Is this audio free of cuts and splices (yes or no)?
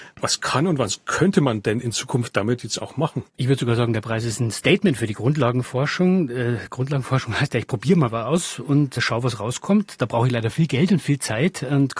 no